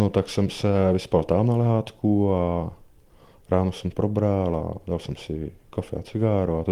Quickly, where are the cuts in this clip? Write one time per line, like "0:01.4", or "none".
0:03.9